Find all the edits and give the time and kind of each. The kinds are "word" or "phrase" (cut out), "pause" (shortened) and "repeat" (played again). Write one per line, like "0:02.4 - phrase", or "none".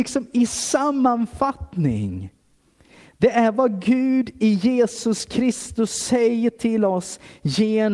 none